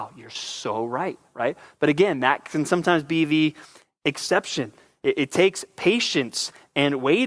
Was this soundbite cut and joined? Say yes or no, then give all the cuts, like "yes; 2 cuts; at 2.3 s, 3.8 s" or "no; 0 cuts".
no; 0 cuts